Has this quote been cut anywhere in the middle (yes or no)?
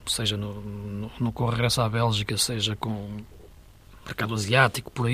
no